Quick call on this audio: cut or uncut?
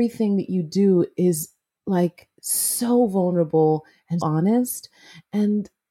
cut